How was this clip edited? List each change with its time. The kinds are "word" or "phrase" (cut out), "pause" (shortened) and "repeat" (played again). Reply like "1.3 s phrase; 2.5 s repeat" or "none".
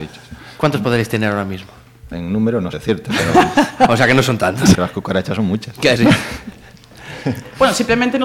2.7 s word; 4.7 s phrase; 6.0 s word